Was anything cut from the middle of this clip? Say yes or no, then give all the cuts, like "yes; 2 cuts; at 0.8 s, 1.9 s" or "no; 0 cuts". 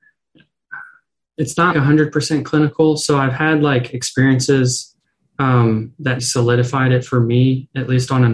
yes; 2 cuts; at 1.7 s, 6.2 s